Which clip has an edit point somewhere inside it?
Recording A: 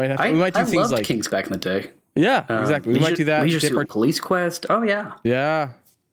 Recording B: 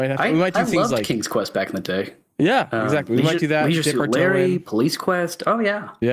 A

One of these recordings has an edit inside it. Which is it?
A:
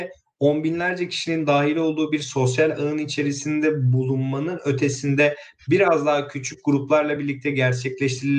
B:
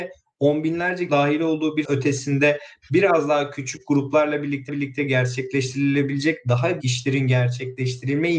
B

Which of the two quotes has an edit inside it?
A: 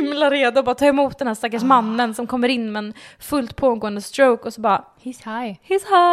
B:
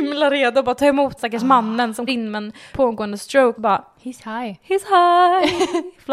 B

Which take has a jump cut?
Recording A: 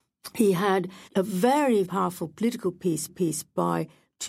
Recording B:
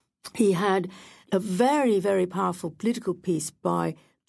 A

